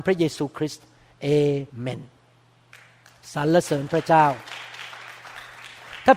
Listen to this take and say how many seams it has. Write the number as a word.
one